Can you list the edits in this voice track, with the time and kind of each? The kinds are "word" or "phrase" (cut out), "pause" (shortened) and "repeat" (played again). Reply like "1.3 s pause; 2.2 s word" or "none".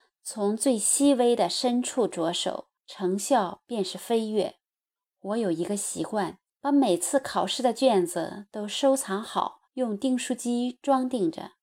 2.8 s pause; 5.0 s pause; 6.5 s pause; 9.7 s pause

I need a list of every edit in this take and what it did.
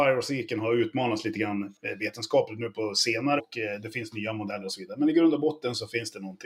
3.4 s word

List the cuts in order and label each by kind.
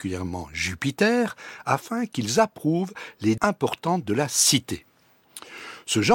3.4 s word

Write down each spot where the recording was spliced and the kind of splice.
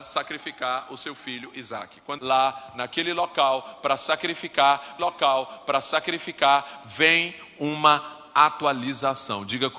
2.2 s phrase; 5.0 s repeat

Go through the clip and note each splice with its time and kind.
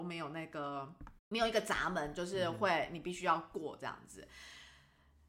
1.2 s pause

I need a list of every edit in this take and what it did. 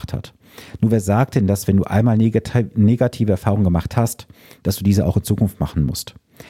none

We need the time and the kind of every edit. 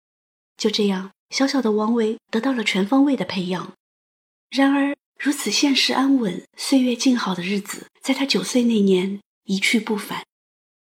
4.0 s pause; 7.9 s pause

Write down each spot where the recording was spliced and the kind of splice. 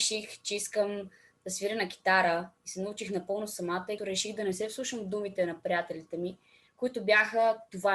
4.0 s word

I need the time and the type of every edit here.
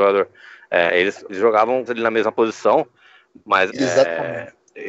1.3 s word; 1.9 s word; 3.7 s word

